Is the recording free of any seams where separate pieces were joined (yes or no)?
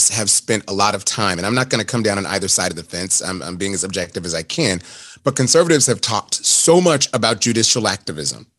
yes